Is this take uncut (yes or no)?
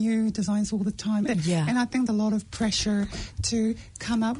no